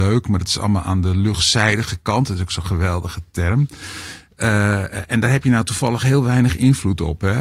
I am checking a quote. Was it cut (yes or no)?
no